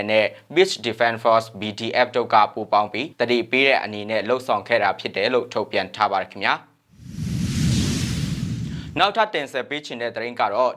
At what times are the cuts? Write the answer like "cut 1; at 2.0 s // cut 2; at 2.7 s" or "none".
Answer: cut 1; at 3.1 s